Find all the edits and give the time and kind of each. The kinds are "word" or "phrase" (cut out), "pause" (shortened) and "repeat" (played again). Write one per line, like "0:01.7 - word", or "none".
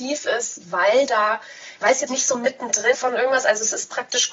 0:02.1 - word
0:02.9 - word